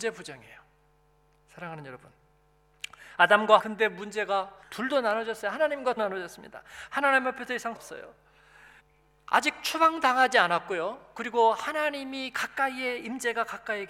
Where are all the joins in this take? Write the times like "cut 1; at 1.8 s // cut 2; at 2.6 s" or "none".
cut 1; at 3.6 s // cut 2; at 4.6 s // cut 3; at 6.0 s // cut 4; at 7.8 s // cut 5; at 8.8 s